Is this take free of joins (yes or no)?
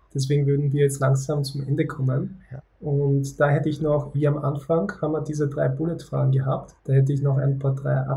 no